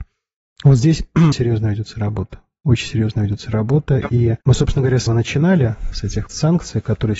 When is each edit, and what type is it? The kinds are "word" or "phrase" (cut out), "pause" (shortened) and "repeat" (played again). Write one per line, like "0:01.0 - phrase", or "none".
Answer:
0:01.3 - word
0:04.4 - pause
0:05.1 - word
0:06.3 - word